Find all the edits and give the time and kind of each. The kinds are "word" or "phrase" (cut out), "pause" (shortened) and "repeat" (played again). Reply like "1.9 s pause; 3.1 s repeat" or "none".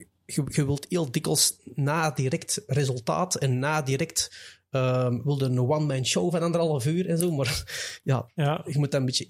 none